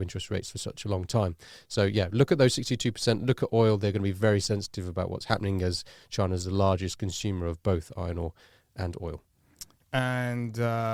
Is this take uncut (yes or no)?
yes